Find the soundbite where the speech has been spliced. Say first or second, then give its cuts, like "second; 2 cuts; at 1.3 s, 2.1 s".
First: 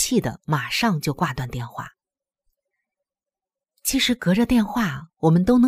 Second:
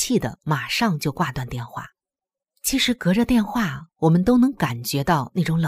second; 1 cut; at 2.2 s